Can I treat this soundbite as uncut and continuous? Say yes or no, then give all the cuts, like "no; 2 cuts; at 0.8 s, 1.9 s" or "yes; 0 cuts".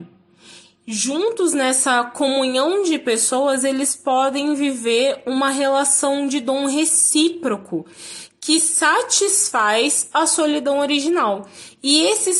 yes; 0 cuts